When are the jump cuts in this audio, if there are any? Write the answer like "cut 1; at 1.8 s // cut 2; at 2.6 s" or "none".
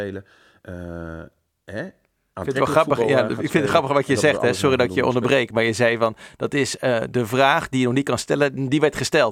none